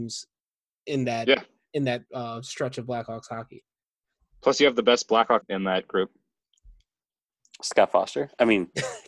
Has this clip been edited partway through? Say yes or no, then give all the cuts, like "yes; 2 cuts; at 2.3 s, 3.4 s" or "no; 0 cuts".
yes; 1 cut; at 5.4 s